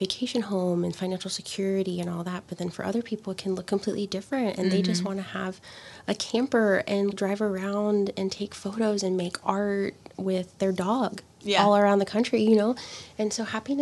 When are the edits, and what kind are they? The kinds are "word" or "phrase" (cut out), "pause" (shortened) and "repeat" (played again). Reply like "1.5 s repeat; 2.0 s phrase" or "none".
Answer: 7.1 s word